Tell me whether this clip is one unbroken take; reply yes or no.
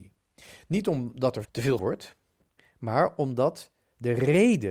no